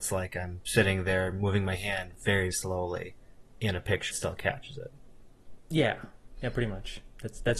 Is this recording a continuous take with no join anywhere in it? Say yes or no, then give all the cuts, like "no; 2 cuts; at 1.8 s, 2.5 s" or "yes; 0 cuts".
no; 2 cuts; at 2.5 s, 4.1 s